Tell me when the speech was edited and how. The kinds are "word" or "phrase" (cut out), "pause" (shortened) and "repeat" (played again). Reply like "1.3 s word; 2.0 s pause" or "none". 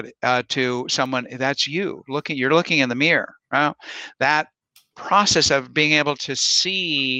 none